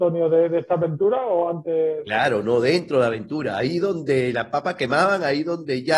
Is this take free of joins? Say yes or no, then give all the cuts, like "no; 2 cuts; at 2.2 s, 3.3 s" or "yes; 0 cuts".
yes; 0 cuts